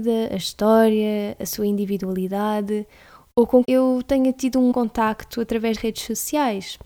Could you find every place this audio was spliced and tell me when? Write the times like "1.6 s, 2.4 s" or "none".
3.6 s, 4.7 s, 5.7 s